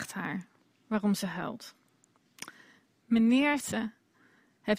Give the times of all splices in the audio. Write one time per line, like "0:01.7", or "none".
0:03.6